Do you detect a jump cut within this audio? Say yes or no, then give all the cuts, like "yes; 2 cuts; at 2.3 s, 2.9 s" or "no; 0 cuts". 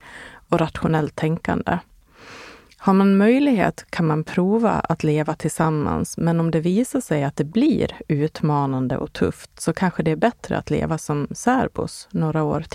no; 0 cuts